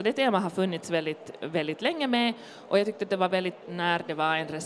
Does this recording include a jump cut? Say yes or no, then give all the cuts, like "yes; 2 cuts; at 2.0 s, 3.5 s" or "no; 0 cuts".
yes; 1 cut; at 3.6 s